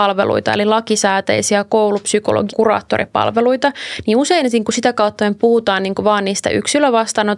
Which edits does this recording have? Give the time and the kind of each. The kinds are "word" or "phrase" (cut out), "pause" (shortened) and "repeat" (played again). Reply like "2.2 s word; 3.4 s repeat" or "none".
2.5 s word